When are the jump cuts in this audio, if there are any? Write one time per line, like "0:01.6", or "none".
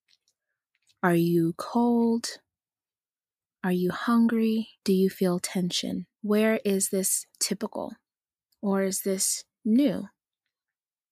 0:04.8
0:06.1
0:07.3